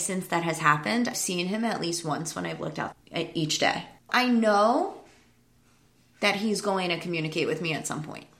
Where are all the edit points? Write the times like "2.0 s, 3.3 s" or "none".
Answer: 1.1 s, 2.9 s, 4.0 s